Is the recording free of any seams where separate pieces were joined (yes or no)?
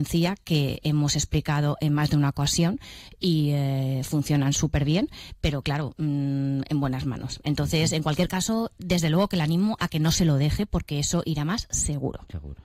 yes